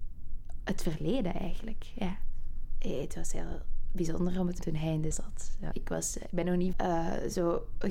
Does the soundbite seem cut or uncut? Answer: cut